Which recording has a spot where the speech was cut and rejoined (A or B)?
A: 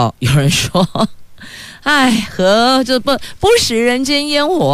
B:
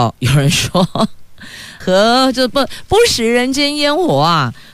B